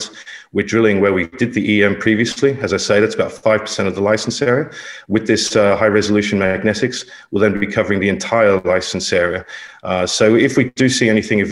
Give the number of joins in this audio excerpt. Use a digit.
0